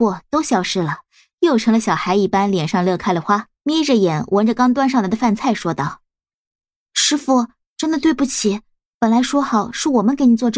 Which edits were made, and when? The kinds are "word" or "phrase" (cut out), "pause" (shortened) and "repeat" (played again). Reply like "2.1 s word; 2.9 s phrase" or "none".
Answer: none